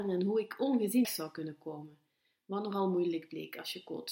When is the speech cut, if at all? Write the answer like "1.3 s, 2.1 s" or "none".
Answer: 1.0 s